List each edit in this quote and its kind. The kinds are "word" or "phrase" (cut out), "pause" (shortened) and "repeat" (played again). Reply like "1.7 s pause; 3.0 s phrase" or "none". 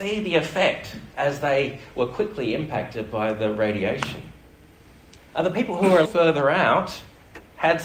1.1 s pause; 6.0 s word